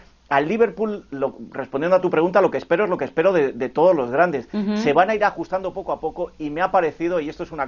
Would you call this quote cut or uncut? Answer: uncut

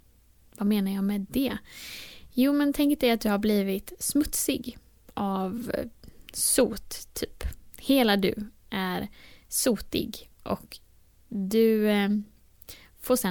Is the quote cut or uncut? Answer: uncut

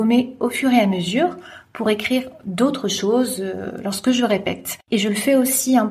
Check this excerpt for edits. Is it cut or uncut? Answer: uncut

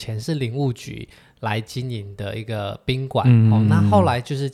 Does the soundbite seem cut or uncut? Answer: uncut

